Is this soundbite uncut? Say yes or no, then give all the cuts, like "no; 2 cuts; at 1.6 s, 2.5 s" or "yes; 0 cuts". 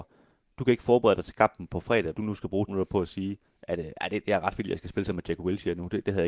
no; 3 cuts; at 2.1 s, 2.7 s, 3.4 s